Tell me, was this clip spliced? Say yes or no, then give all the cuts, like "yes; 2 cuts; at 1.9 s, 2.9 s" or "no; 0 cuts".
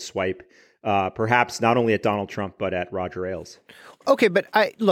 no; 0 cuts